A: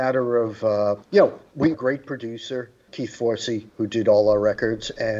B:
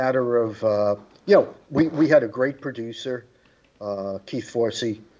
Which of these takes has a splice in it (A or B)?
A